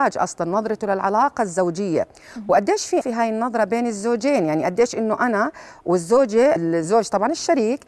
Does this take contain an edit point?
yes; 2 cuts; at 3.0 s, 6.6 s

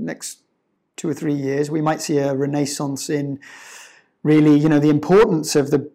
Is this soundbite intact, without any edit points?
yes; 0 cuts

